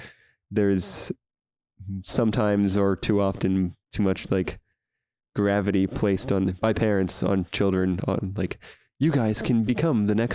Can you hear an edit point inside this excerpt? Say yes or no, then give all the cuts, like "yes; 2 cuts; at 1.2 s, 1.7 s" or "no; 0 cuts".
no; 0 cuts